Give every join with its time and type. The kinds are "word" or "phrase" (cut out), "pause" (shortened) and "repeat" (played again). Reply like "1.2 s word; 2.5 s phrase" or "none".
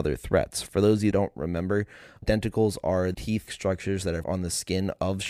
1.1 s word; 2.2 s word; 3.1 s word; 3.5 s word; 4.2 s word